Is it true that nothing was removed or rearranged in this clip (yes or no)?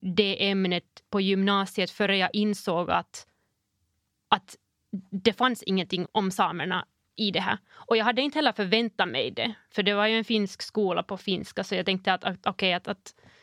no